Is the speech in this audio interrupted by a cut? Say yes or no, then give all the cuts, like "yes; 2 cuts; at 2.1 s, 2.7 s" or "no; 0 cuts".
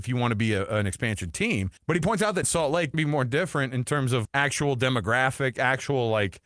yes; 4 cuts; at 1.8 s, 2.4 s, 2.9 s, 4.2 s